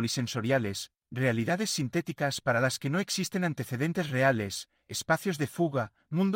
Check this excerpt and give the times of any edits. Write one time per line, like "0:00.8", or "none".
none